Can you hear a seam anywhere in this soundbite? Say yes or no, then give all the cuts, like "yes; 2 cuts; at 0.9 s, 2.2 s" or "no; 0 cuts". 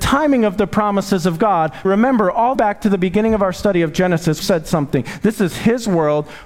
yes; 3 cuts; at 1.8 s, 2.5 s, 4.4 s